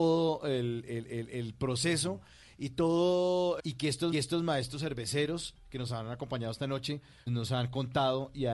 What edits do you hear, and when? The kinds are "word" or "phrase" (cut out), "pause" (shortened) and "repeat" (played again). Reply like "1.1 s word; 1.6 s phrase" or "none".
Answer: 1.0 s repeat; 3.6 s phrase; 4.1 s repeat; 7.3 s word